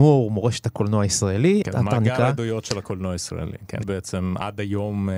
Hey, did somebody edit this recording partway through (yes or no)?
yes